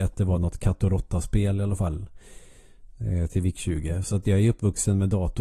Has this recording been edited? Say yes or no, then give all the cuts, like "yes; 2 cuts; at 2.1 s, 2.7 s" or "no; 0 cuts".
yes; 1 cut; at 4.2 s